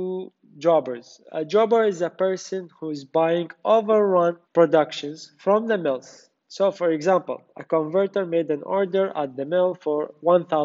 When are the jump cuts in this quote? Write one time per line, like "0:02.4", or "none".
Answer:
0:04.4